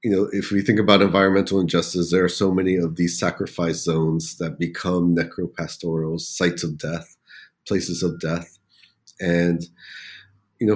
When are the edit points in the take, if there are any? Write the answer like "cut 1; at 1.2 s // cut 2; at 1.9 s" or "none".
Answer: none